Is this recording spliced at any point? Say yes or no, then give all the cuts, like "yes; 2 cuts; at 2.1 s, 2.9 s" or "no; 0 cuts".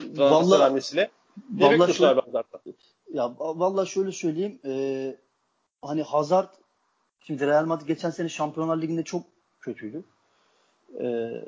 no; 0 cuts